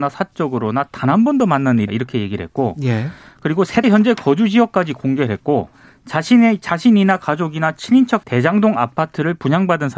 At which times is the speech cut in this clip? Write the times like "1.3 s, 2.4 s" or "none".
1.9 s, 3.8 s, 8.2 s